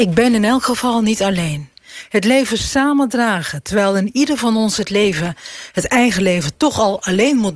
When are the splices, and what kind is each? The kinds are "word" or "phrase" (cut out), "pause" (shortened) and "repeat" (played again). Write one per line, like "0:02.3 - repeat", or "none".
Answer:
none